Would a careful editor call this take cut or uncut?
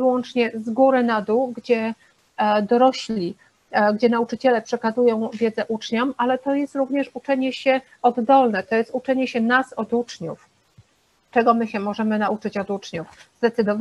uncut